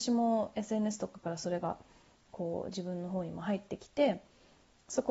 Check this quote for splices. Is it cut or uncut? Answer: uncut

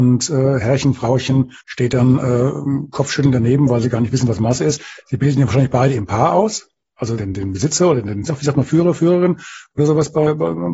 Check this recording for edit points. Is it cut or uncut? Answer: cut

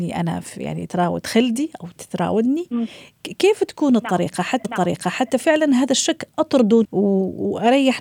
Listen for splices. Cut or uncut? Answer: cut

